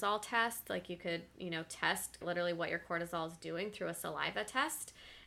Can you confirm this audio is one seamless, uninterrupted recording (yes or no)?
no